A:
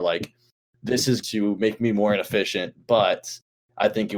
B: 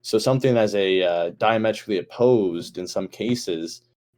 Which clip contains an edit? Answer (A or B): A